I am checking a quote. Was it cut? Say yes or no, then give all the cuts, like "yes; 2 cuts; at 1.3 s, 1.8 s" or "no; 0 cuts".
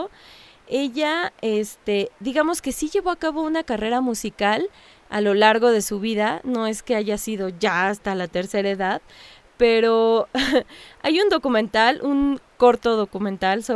no; 0 cuts